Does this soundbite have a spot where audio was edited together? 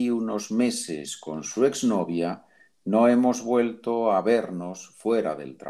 no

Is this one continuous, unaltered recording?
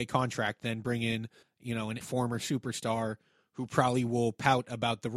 no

